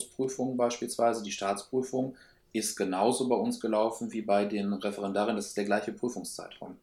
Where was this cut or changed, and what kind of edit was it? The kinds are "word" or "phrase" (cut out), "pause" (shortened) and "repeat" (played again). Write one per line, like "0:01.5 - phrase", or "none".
none